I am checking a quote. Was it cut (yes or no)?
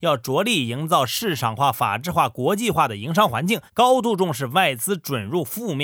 yes